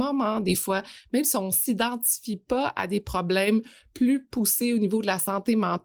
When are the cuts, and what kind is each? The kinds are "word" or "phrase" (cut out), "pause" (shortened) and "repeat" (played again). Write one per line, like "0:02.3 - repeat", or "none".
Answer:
none